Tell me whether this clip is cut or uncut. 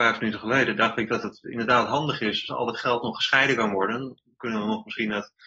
uncut